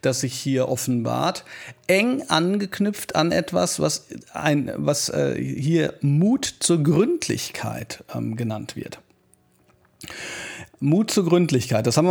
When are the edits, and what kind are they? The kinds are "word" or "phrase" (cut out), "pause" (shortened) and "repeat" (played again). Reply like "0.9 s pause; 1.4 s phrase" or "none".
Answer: none